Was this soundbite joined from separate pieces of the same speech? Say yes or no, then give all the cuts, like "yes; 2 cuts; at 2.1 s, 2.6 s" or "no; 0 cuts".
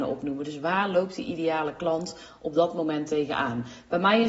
no; 0 cuts